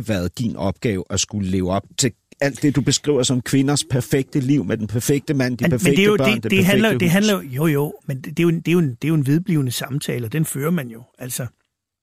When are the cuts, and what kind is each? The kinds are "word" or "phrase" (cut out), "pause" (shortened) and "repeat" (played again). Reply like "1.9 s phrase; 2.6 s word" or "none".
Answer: none